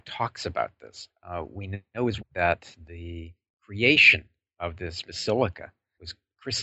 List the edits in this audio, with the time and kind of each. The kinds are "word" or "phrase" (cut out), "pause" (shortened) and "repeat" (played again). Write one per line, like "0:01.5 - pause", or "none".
0:02.2 - word
0:05.0 - word

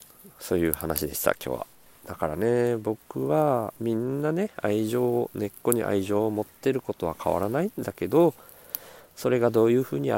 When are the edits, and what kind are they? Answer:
0:01.9 - pause
0:03.8 - pause

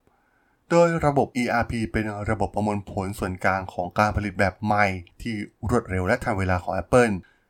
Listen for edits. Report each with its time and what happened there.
0:01.3 - pause

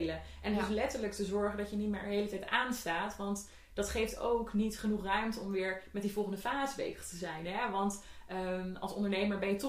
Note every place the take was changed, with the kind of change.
none

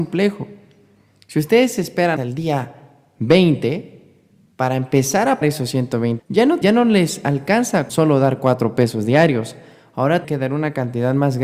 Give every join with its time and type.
0:02.2 - word
0:05.4 - word
0:06.2 - word
0:06.6 - word
0:07.9 - word
0:10.2 - word

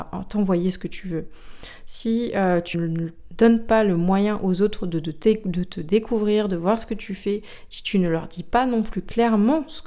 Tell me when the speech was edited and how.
0:02.7 - word

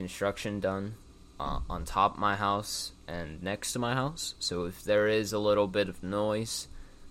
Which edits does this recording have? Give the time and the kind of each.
none

